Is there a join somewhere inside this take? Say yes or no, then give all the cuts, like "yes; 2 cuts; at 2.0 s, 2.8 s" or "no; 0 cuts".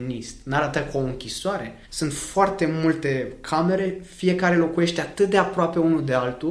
no; 0 cuts